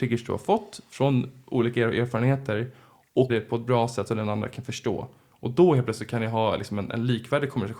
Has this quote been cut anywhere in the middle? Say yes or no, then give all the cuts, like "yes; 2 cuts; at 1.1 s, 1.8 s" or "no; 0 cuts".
yes; 1 cut; at 3.3 s